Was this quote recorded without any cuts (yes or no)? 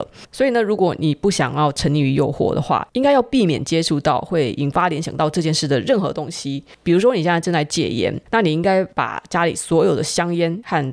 yes